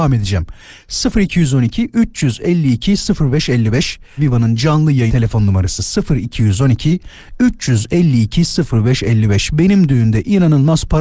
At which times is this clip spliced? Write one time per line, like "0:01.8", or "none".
0:04.2
0:05.1